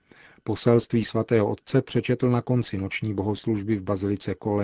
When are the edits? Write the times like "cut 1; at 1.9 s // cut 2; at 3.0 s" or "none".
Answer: none